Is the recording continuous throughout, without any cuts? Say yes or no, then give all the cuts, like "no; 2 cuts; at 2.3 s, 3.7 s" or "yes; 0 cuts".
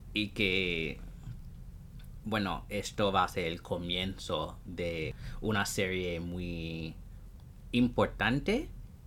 yes; 0 cuts